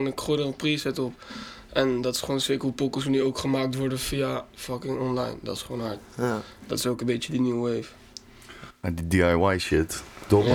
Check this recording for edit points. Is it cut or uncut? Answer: uncut